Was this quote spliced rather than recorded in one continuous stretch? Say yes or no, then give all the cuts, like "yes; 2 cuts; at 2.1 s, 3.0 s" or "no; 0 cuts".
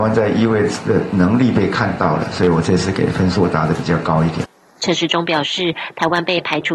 no; 0 cuts